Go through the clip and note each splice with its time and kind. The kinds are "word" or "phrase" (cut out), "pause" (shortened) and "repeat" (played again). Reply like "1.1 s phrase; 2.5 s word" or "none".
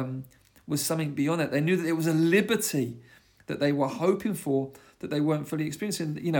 none